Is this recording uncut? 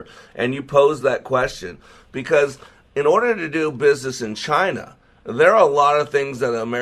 yes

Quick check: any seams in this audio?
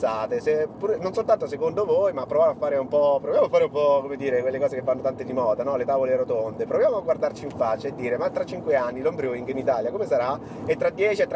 no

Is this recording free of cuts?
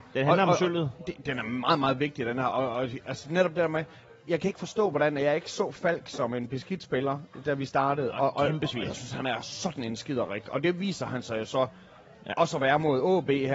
yes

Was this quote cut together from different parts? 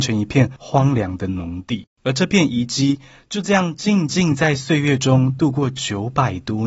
yes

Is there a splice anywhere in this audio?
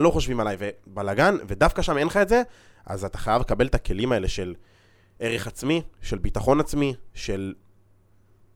no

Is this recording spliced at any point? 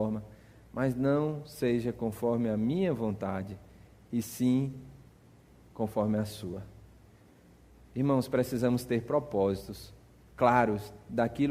no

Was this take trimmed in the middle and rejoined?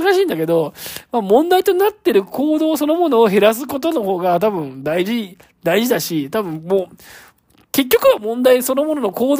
no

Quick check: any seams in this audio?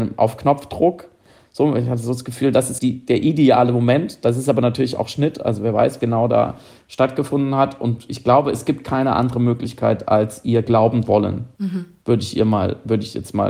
yes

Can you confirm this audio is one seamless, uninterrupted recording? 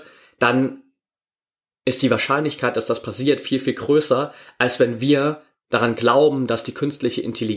yes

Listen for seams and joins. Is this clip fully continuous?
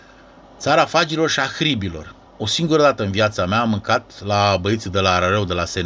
no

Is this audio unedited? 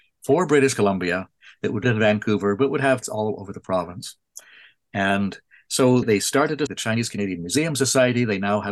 no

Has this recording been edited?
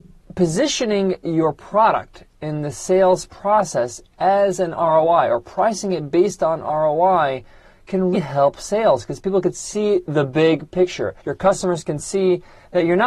yes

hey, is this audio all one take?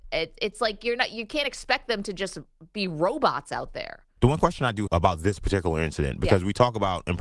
no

